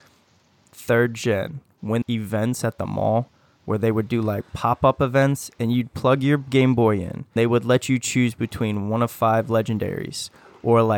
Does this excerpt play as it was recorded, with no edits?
no; 2 cuts; at 2.0 s, 7.4 s

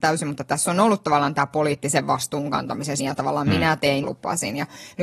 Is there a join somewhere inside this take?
yes; 2 cuts; at 3.0 s, 4.0 s

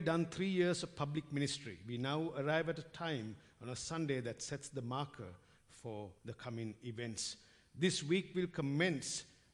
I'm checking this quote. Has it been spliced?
yes; 1 cut; at 6.2 s

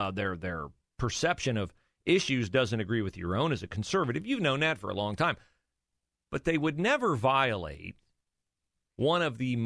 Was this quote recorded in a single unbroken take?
yes; 0 cuts

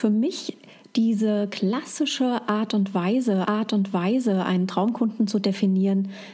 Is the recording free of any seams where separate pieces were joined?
no; 1 cut; at 3.4 s

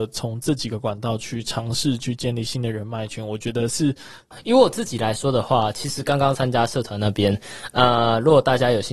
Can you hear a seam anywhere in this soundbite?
no; 0 cuts

